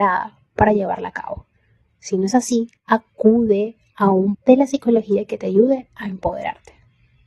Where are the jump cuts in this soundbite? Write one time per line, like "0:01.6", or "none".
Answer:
0:02.8
0:04.3